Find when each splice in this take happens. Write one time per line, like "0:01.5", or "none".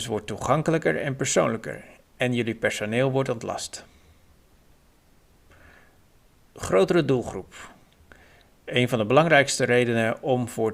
none